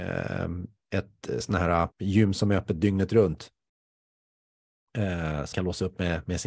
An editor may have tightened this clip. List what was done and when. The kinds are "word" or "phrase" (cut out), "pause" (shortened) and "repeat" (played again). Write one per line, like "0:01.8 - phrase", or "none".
0:01.9 - pause
0:05.5 - word